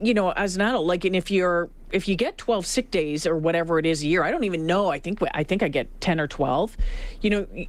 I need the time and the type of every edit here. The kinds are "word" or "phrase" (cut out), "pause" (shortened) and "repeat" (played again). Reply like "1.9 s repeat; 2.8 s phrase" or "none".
none